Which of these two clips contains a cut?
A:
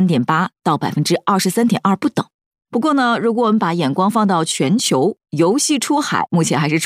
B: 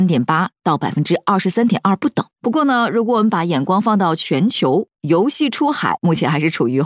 B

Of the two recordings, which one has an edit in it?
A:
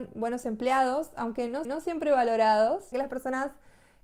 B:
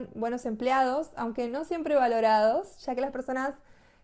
A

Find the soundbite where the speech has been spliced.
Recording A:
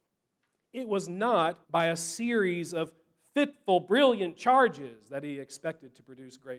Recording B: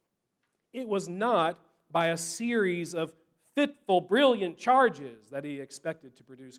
A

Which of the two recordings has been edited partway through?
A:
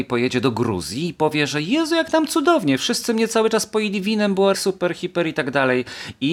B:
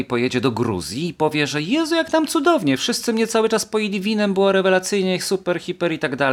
A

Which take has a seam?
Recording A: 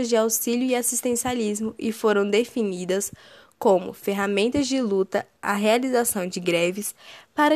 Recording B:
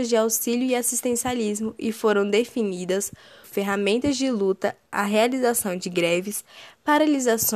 B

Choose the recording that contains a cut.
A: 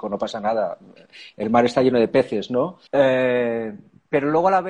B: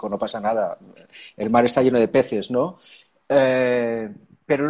A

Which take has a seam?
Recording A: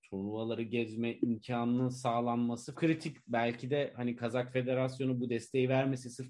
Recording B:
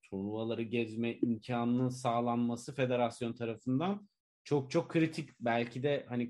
A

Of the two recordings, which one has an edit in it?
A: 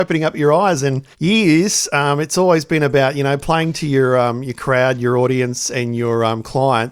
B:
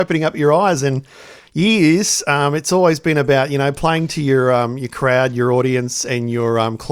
A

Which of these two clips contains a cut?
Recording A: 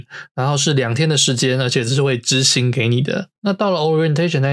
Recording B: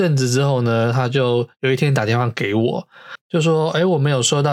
A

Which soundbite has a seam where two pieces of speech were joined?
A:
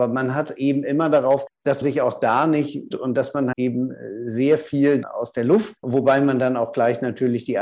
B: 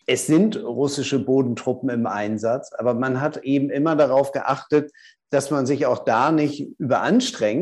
A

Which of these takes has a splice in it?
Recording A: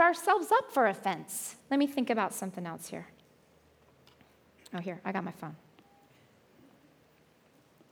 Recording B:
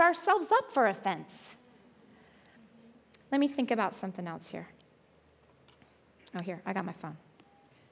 A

